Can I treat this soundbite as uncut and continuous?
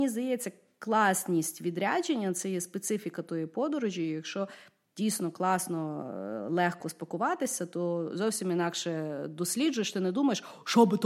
yes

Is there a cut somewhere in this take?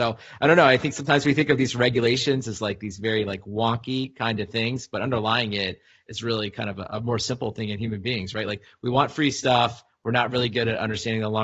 no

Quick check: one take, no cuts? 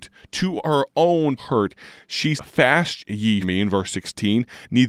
no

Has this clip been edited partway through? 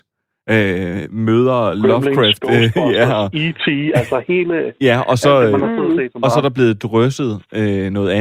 no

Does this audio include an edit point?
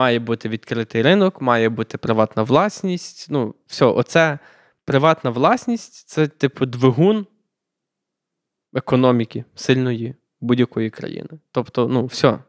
no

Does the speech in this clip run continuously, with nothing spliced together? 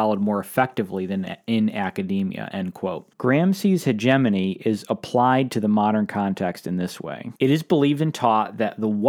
no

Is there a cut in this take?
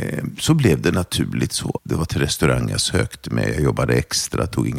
yes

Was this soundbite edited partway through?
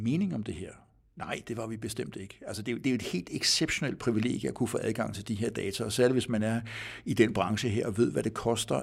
no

